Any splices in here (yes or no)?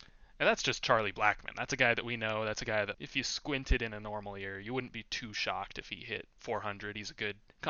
yes